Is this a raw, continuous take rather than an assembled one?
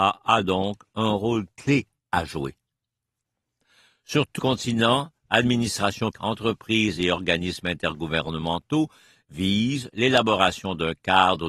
no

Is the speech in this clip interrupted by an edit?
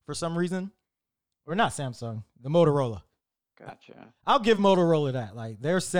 no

